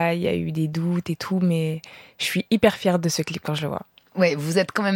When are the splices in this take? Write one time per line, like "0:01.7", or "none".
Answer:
none